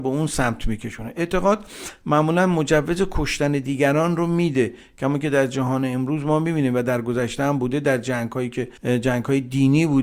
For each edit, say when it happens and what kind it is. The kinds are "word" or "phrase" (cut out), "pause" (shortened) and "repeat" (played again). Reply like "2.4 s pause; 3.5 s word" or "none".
8.8 s pause